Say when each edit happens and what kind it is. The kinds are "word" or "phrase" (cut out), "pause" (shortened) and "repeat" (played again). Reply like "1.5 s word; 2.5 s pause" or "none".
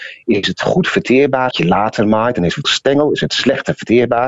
1.5 s phrase; 2.6 s word

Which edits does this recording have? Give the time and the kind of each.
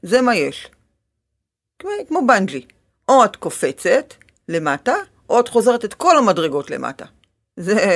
none

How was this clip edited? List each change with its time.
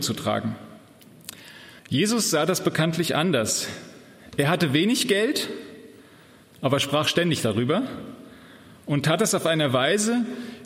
1.8 s pause

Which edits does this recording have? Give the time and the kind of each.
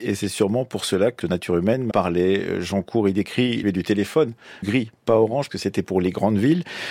1.2 s word; 1.9 s word; 3.6 s word; 4.6 s word; 5.5 s word

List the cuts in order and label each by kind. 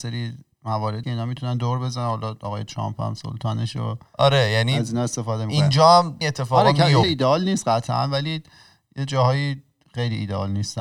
1.0 s word; 6.2 s word; 7.0 s word

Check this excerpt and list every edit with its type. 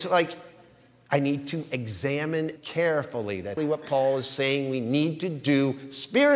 2.6 s word; 3.6 s word

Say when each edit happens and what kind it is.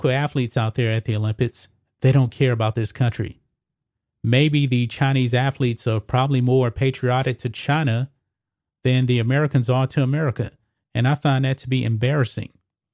none

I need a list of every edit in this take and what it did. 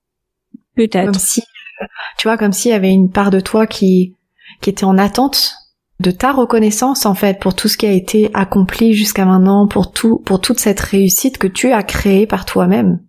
6.0 s word

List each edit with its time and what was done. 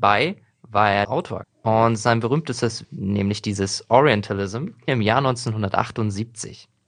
1.0 s word; 1.4 s word; 2.8 s word; 4.9 s word

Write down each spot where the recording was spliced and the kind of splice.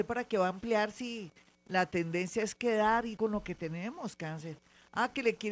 3.2 s word

